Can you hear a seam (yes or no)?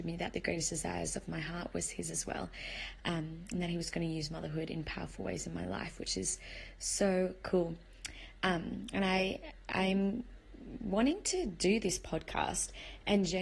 no